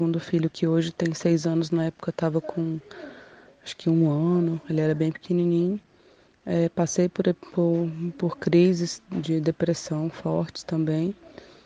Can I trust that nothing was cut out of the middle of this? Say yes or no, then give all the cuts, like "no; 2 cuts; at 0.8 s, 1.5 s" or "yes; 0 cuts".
yes; 0 cuts